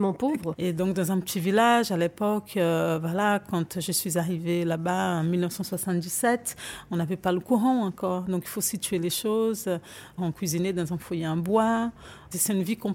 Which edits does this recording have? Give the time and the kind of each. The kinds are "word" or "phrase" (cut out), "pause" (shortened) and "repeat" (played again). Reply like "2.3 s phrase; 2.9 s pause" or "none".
none